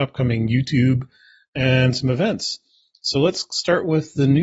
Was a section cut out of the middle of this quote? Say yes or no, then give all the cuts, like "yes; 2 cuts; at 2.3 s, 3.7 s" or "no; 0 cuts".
no; 0 cuts